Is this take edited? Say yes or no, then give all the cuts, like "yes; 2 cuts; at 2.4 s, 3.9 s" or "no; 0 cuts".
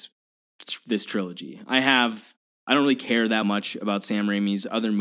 no; 0 cuts